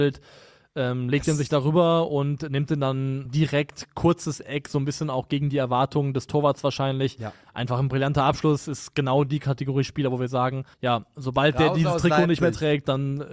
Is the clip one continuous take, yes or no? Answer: no